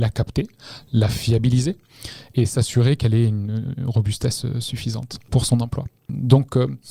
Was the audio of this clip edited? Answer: no; 0 cuts

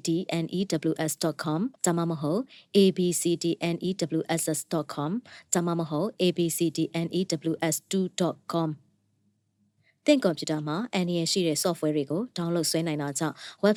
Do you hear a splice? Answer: yes; 1 cut; at 1.8 s

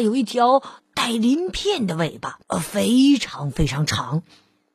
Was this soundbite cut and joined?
yes; 1 cut; at 2.4 s

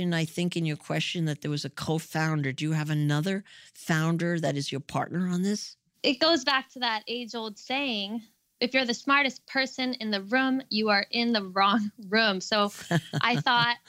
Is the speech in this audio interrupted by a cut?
no; 0 cuts

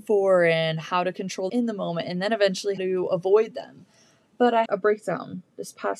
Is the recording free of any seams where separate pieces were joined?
no; 3 cuts; at 1.5 s, 2.8 s, 4.7 s

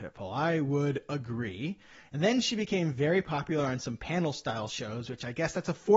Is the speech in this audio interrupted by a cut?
no; 0 cuts

